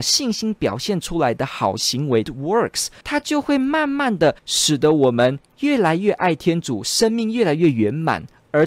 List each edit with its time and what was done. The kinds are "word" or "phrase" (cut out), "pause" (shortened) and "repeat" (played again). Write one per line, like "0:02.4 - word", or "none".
0:02.2 - phrase
0:03.0 - pause
0:04.4 - pause